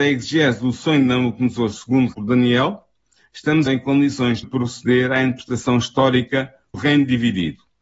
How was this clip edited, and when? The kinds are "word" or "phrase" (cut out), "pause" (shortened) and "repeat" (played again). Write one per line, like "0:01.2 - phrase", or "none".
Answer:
0:02.1 - word
0:03.7 - word
0:04.4 - word
0:06.7 - word